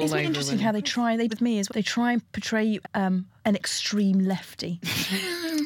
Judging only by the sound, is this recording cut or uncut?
cut